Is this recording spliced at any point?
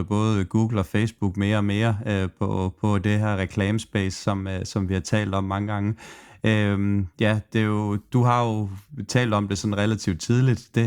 no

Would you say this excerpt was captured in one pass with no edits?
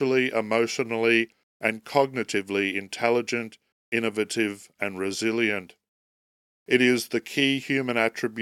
yes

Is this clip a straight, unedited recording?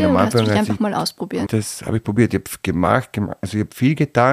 no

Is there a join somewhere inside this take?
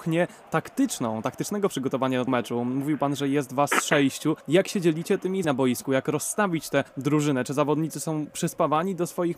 yes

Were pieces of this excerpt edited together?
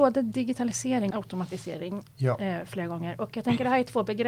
yes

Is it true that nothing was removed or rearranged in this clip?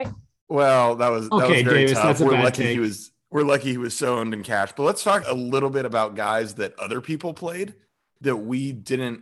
no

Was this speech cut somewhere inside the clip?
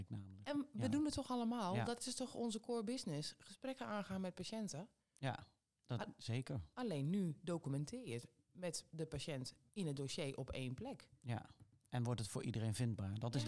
no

